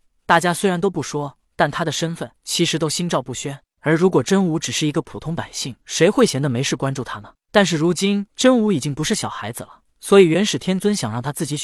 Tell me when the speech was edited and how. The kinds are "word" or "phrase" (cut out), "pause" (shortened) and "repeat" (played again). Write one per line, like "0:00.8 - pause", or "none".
0:01.4 - pause
0:02.4 - pause
0:05.8 - pause
0:08.3 - pause
0:09.9 - pause